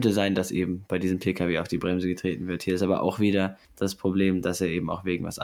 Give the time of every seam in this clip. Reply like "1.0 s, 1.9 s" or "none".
3.6 s